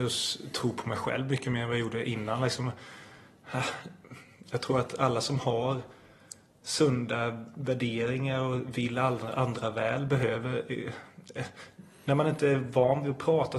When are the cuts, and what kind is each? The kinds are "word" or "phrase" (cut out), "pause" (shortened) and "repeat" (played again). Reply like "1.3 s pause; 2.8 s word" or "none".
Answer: none

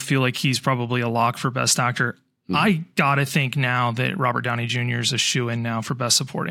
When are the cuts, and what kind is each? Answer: none

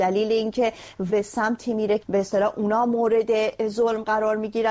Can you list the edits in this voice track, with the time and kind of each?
1.1 s word; 2.0 s word

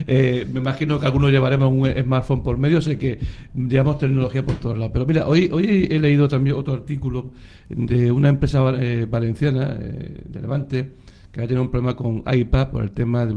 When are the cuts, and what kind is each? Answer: none

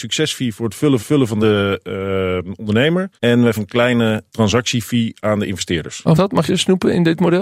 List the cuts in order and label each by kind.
1.0 s repeat; 1.4 s phrase; 3.2 s pause; 3.5 s word; 4.3 s word; 6.1 s word; 6.5 s phrase

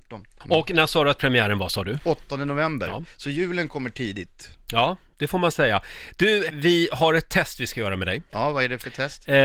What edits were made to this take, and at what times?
6.5 s word

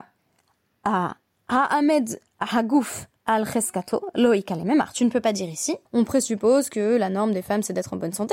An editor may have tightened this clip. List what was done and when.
3.2 s pause; 5.9 s pause

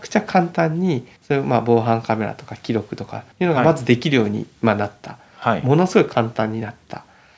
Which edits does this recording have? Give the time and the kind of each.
1.2 s pause; 3.3 s pause

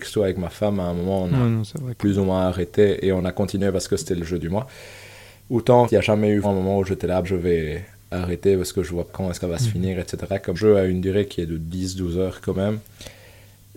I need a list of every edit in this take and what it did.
5.9 s word; 6.4 s word; 7.2 s word; 9.1 s word; 9.4 s word; 10.5 s word

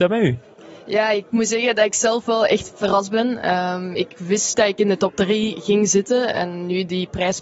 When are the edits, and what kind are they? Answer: 4.5 s word

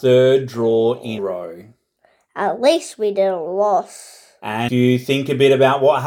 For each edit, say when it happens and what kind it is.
1.2 s word; 4.7 s word

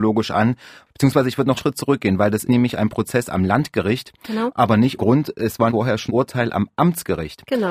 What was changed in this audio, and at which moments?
1.6 s word; 2.4 s word; 5.0 s word; 5.7 s word; 6.1 s word

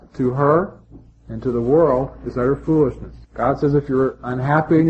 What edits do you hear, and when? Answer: 3.2 s pause

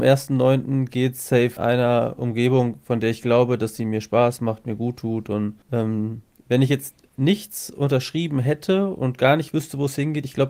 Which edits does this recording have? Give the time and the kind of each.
1.6 s phrase; 5.6 s pause

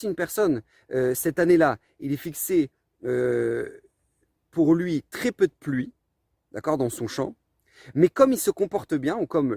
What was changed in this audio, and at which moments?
none

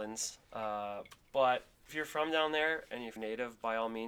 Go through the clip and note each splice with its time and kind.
1.9 s word; 3.2 s word

